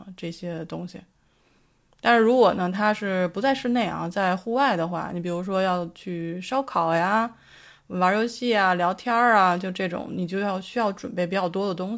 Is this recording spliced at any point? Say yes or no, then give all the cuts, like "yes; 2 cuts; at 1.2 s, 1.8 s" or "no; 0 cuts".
no; 0 cuts